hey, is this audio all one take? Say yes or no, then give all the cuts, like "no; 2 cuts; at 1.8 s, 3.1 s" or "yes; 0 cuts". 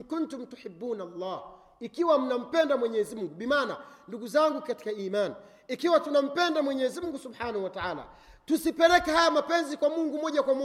yes; 0 cuts